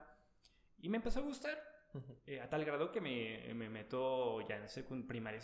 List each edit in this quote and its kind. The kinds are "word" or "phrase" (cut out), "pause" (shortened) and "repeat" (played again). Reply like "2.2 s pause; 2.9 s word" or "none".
none